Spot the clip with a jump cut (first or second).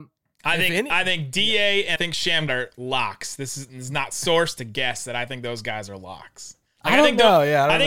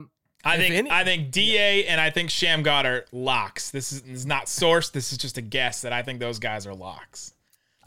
first